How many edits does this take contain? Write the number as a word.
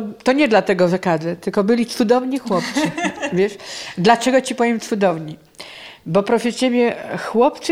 zero